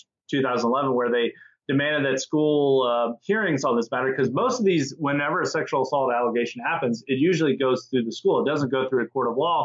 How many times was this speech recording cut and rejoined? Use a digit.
0